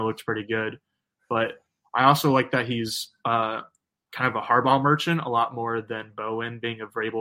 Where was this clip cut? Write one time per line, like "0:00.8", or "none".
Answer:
none